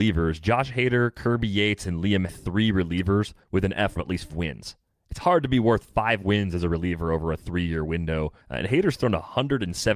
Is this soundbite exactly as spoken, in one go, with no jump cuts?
no; 5 cuts; at 2.3 s, 3.4 s, 4.0 s, 4.3 s, 8.4 s

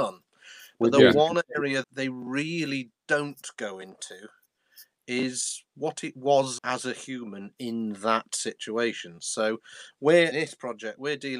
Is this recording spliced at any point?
yes; 3 cuts; at 1.8 s, 6.6 s, 10.3 s

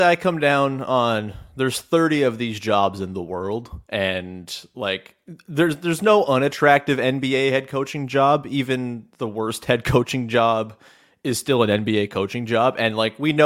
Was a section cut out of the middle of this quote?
no; 0 cuts

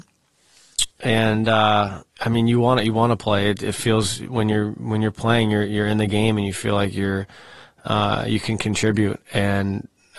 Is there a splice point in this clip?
yes; 2 cuts; at 0.9 s, 2.1 s

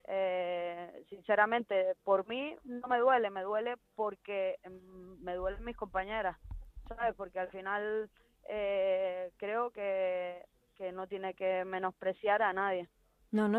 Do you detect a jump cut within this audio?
no; 0 cuts

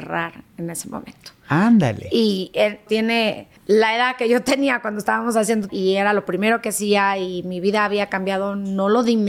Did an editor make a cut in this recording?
yes; 3 cuts; at 2.9 s, 3.6 s, 5.7 s

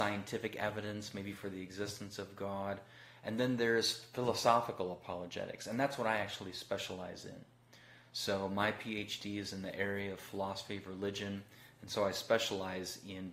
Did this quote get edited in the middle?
no; 0 cuts

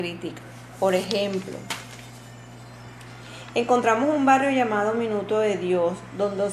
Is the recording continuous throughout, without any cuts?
yes; 0 cuts

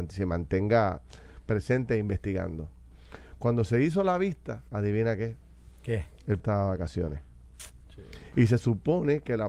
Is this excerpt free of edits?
no; 2 cuts; at 4.7 s, 6.4 s

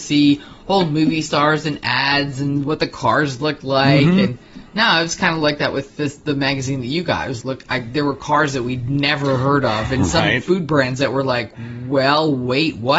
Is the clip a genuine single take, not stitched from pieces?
no; 1 cut; at 7.4 s

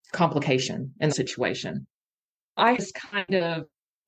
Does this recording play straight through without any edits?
no; 2 cuts; at 1.1 s, 2.8 s

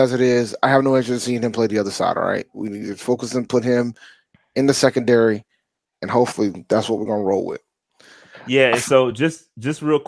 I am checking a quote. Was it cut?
no; 0 cuts

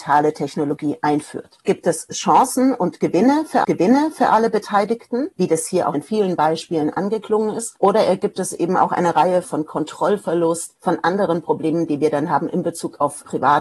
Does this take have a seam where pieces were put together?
yes; 3 cuts; at 3.6 s, 5.9 s, 9.4 s

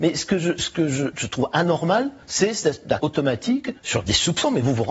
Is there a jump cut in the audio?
yes; 4 cuts; at 1.1 s, 2.2 s, 3.0 s, 3.8 s

